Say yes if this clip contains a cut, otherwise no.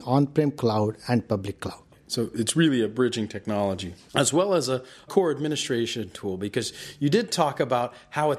no